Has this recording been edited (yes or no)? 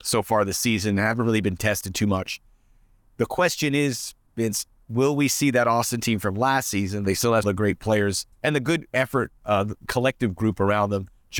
yes